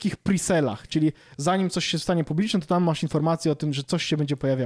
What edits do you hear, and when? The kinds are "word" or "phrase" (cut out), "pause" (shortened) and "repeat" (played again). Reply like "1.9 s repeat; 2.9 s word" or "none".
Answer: none